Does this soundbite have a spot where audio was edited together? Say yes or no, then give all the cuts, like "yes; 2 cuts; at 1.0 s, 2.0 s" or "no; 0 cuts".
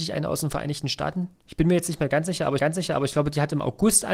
yes; 1 cut; at 2.6 s